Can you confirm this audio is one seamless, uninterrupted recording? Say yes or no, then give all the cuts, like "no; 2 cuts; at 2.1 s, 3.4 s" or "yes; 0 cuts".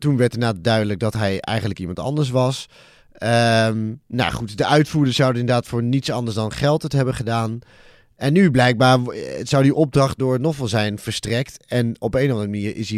no; 1 cut; at 10.2 s